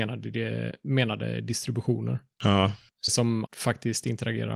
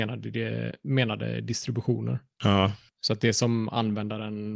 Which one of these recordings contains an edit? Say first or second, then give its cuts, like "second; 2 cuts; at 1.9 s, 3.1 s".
first; 2 cuts; at 3.1 s, 3.5 s